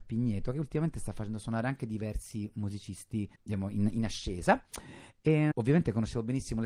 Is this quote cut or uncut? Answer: cut